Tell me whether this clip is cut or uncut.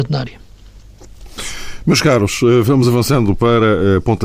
uncut